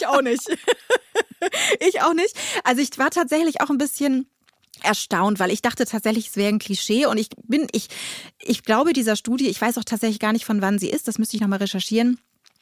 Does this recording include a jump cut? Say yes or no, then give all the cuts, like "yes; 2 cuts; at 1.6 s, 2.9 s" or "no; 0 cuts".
no; 0 cuts